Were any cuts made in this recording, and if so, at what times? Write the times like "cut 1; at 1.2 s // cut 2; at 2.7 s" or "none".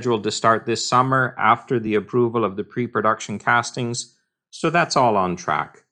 none